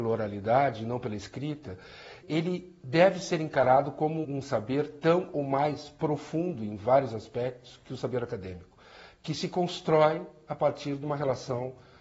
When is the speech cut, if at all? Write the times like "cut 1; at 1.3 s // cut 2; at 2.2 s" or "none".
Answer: cut 1; at 2.2 s // cut 2; at 4.2 s